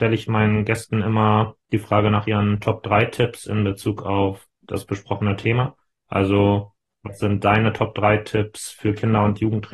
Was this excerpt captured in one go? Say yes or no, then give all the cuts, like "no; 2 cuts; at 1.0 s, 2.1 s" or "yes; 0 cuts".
yes; 0 cuts